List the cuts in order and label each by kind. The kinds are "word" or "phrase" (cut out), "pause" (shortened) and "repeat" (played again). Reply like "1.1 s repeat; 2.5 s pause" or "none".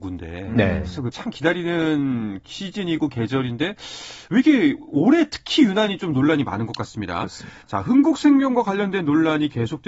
1.1 s word; 7.6 s pause

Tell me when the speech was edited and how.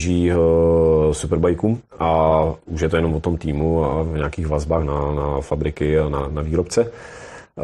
1.9 s pause

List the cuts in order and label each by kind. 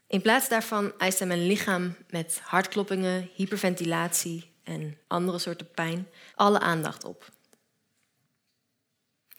5.0 s pause; 6.3 s pause

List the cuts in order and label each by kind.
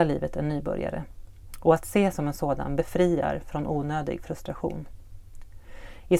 2.1 s word

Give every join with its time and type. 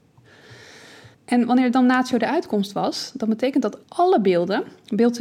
1.1 s pause; 3.8 s pause

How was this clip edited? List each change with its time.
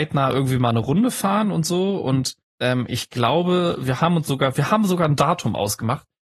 2.4 s pause

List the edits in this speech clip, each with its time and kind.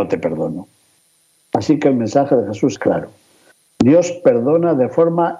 2.8 s word

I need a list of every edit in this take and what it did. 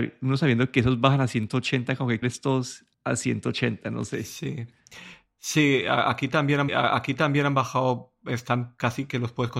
2.2 s phrase; 2.9 s pause; 6.7 s repeat

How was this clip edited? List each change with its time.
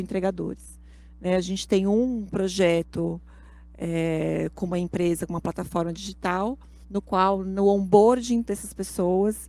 6.8 s pause

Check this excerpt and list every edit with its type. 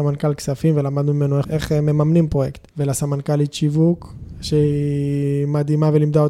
1.4 s word; 2.7 s pause

